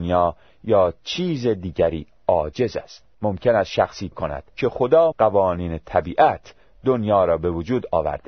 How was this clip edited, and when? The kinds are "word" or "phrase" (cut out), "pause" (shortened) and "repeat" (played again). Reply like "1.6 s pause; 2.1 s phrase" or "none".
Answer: 3.1 s pause; 4.1 s word; 4.5 s pause; 5.1 s word